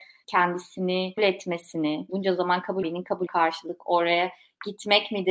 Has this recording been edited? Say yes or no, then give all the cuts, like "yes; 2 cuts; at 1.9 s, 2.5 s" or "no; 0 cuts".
yes; 4 cuts; at 1.2 s, 2.1 s, 2.8 s, 3.3 s